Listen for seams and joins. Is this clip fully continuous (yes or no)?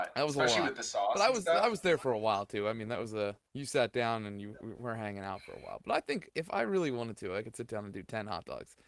no